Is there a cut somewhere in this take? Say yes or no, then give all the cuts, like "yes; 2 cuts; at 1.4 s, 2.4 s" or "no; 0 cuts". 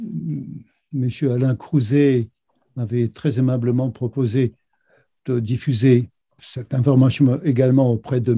yes; 1 cut; at 6.4 s